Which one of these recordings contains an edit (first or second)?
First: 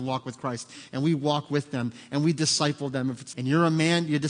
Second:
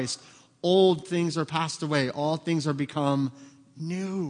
first